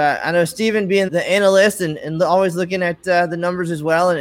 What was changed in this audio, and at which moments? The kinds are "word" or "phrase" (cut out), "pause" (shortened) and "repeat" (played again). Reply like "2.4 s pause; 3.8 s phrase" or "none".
1.1 s word